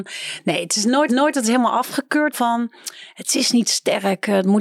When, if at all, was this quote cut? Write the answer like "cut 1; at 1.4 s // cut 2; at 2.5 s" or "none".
cut 1; at 1.1 s // cut 2; at 2.3 s